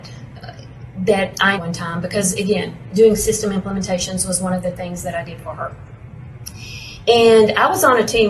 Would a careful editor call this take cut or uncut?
cut